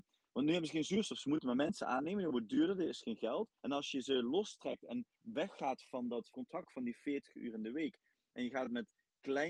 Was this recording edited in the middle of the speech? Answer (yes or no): yes